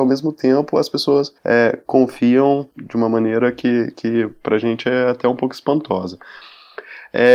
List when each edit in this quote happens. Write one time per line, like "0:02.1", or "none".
0:01.4
0:02.7